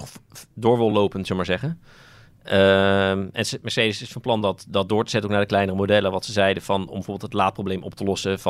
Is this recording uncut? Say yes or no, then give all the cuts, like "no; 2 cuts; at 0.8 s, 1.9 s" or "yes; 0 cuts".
yes; 0 cuts